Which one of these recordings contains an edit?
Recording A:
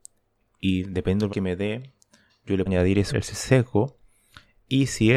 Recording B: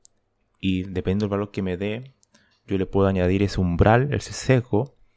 A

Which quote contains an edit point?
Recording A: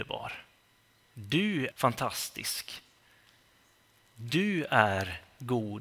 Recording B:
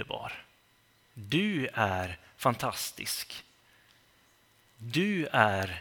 A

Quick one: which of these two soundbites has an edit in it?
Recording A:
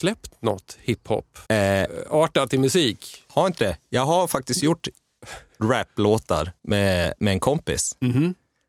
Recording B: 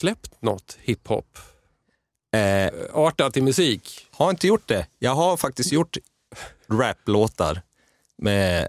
A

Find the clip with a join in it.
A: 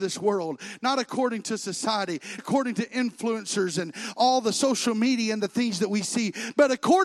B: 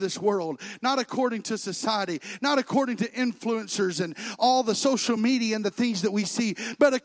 A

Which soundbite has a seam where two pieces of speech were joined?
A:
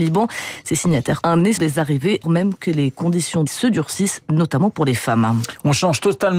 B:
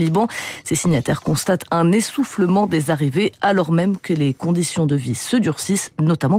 A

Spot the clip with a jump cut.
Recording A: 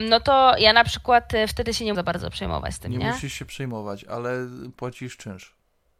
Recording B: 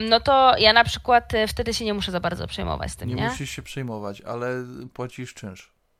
A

